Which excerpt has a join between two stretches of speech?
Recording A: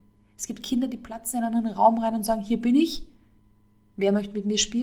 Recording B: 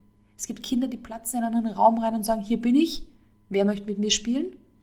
B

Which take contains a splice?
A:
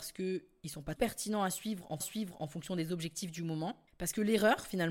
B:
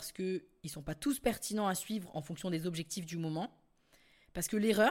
A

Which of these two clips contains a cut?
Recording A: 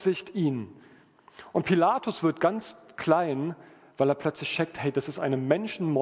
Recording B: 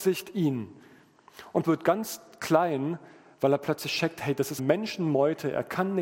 B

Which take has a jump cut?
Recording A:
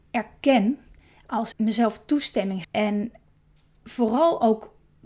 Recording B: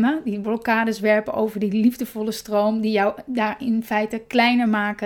A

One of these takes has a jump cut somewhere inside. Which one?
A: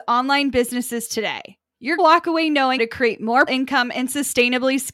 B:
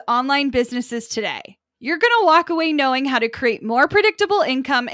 A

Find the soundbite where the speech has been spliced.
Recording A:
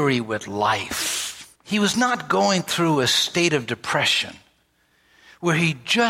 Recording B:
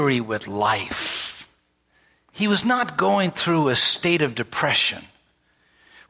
A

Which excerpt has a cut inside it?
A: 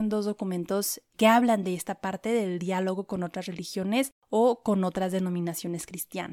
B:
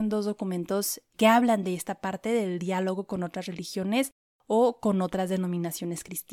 A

